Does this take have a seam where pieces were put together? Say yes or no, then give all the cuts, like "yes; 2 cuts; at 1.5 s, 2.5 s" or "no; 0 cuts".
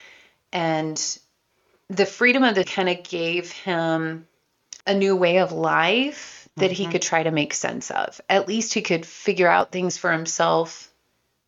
yes; 2 cuts; at 2.6 s, 4.8 s